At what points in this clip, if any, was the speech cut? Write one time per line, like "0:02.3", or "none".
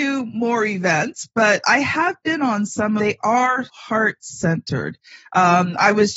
0:03.0
0:03.7